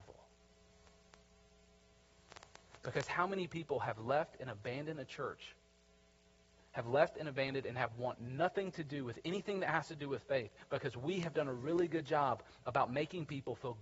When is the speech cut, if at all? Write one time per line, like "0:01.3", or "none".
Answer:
none